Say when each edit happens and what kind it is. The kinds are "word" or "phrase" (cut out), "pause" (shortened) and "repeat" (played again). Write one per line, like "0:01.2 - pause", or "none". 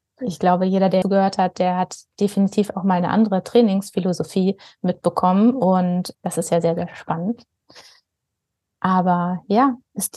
0:01.0 - word
0:06.1 - word